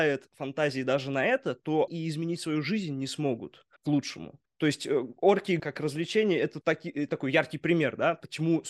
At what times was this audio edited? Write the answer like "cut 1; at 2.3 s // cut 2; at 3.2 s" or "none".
cut 1; at 1.9 s // cut 2; at 3.8 s // cut 3; at 4.5 s // cut 4; at 5.6 s // cut 5; at 6.6 s